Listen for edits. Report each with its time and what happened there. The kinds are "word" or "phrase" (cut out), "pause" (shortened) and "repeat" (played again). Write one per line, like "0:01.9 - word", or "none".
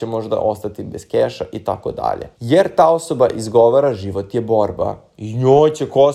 0:02.3 - pause